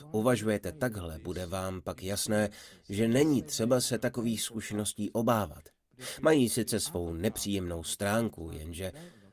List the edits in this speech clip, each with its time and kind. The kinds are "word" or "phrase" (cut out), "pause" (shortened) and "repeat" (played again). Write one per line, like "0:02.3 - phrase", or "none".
none